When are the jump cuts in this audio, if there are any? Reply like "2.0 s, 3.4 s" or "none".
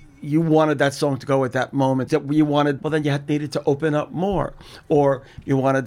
2.1 s, 2.8 s